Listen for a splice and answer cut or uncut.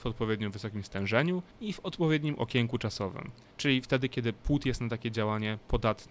cut